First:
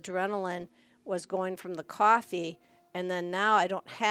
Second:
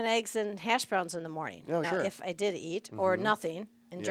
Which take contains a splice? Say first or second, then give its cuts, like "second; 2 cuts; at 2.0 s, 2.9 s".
second; 1 cut; at 1.8 s